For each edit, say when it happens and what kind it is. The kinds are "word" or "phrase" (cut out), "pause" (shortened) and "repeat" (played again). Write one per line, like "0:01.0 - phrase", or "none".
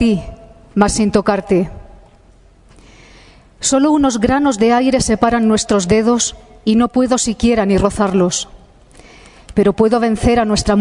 none

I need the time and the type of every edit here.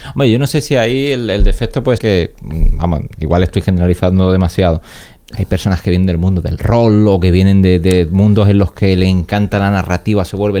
0:02.0 - word

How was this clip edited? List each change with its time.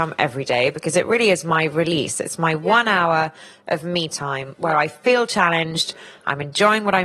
none

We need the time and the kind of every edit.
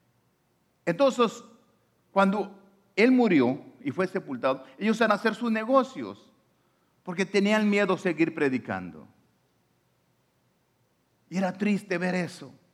0:05.1 - word

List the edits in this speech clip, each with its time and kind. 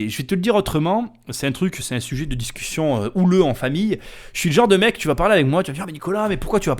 0:05.8 - word

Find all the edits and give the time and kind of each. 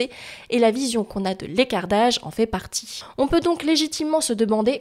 none

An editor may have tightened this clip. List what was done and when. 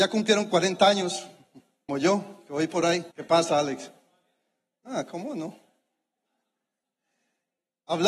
0:01.9 - word
0:03.1 - pause

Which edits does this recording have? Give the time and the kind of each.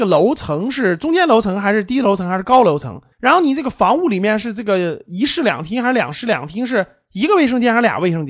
0:03.1 - pause

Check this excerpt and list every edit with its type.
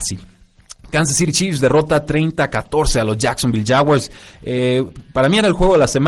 none

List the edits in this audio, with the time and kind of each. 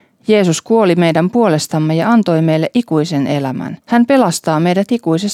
0:03.8 - pause

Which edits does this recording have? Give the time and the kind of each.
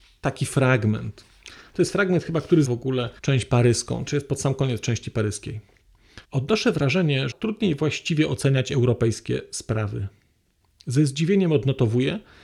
0:02.6 - word
0:03.2 - pause
0:04.1 - word
0:06.2 - pause
0:07.3 - phrase

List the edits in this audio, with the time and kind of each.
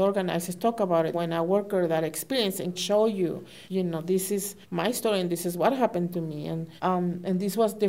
0:01.1 - word
0:02.7 - word
0:03.6 - pause
0:04.6 - pause
0:06.8 - pause

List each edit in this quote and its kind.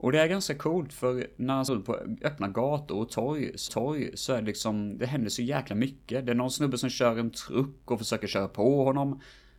0:01.7 - word
0:03.7 - repeat

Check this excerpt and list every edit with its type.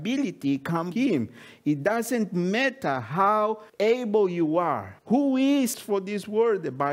0:00.9 - word
0:03.7 - pause
0:05.0 - pause
0:05.7 - word

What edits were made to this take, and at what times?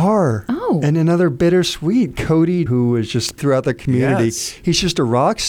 0:02.7 - word
0:03.4 - word

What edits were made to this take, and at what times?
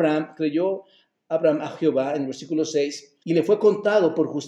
0:03.2 - pause

